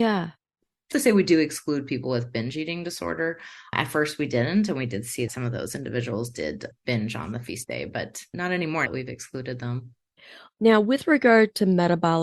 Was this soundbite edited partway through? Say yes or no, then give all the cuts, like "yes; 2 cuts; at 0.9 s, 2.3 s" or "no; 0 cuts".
yes; 3 cuts; at 0.9 s, 5.3 s, 8.9 s